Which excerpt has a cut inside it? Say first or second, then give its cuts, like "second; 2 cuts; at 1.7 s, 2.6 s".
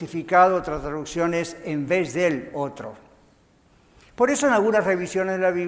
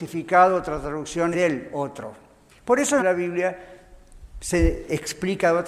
second; 3 cuts; at 1.3 s, 2.5 s, 3.0 s